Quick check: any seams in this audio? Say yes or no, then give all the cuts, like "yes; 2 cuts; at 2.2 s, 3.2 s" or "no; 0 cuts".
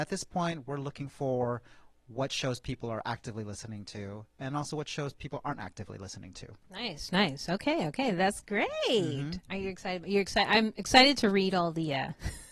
no; 0 cuts